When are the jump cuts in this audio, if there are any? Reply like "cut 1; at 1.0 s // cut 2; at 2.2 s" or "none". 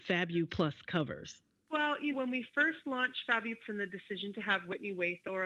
cut 1; at 2.1 s // cut 2; at 3.6 s

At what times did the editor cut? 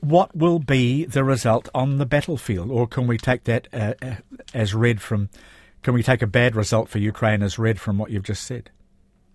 none

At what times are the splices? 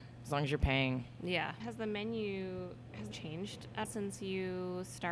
cut 1; at 1.6 s // cut 2; at 3.1 s // cut 3; at 3.8 s

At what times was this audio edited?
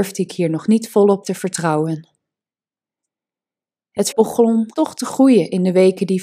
cut 1; at 1.2 s // cut 2; at 4.1 s // cut 3; at 4.7 s

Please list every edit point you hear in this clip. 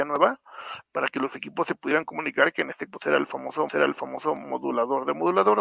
cut 1; at 2.9 s // cut 2; at 3.7 s

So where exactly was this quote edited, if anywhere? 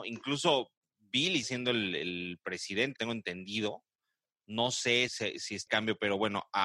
cut 1; at 1.4 s // cut 2; at 3.0 s // cut 3; at 5.1 s // cut 4; at 5.7 s

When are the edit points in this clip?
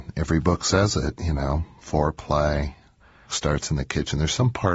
cut 1; at 3.3 s

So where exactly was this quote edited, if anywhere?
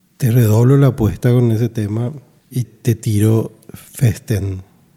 cut 1; at 2.6 s

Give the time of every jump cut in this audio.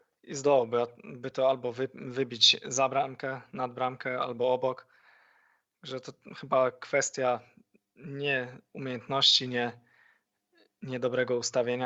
none

